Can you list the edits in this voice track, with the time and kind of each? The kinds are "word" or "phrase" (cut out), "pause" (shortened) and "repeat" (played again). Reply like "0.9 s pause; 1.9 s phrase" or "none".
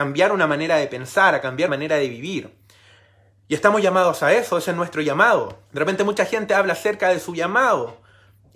1.7 s word; 5.7 s pause